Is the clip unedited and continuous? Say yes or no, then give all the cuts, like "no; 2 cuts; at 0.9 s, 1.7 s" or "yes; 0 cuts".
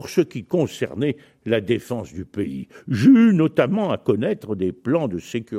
yes; 0 cuts